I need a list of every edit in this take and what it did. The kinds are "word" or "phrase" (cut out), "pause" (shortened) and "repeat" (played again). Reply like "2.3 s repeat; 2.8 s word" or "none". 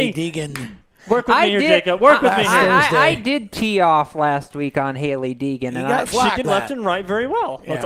6.1 s word; 6.4 s word